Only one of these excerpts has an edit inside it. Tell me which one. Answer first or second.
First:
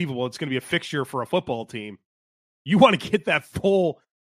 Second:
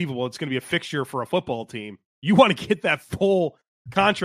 second